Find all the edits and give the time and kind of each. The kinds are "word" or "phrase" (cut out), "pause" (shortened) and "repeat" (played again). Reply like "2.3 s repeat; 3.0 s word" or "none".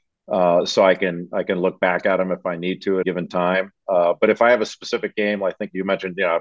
3.0 s word